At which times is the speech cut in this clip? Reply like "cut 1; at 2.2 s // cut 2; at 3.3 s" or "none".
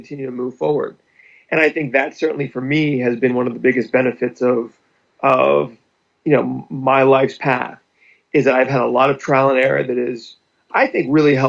none